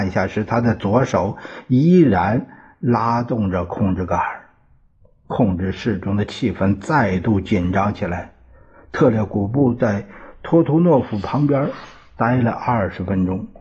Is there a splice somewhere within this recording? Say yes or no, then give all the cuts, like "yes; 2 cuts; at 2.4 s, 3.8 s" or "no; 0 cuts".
no; 0 cuts